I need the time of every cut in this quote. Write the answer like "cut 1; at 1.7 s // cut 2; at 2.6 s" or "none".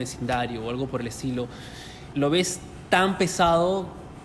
cut 1; at 2.1 s